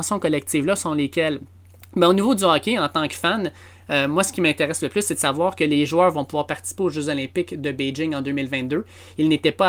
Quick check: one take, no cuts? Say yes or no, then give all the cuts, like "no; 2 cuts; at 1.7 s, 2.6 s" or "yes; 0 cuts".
yes; 0 cuts